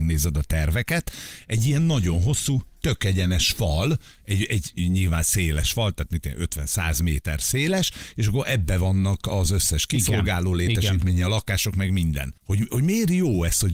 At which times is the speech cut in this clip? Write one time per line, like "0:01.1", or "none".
0:12.4